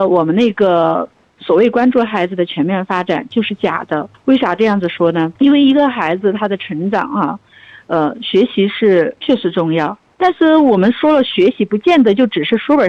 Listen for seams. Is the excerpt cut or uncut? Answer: uncut